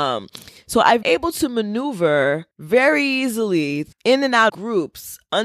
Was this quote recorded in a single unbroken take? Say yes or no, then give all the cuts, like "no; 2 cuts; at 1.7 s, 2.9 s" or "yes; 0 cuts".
no; 4 cuts; at 1.0 s, 2.5 s, 3.9 s, 4.5 s